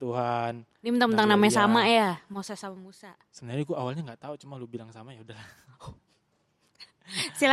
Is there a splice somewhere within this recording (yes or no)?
no